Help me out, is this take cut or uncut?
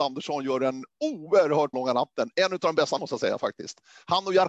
cut